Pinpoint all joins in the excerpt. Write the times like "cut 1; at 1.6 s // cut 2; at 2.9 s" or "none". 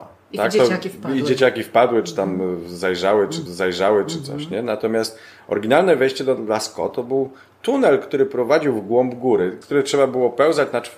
cut 1; at 3.5 s // cut 2; at 9.6 s